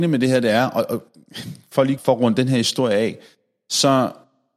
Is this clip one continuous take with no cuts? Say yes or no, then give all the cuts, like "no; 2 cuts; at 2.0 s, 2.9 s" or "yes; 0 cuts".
no; 1 cut; at 2.0 s